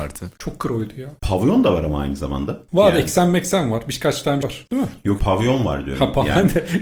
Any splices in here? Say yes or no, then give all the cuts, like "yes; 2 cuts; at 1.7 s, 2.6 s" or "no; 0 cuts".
yes; 2 cuts; at 4.4 s, 5.2 s